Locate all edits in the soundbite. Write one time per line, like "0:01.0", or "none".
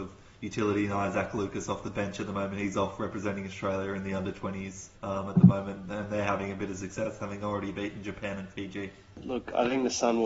0:05.0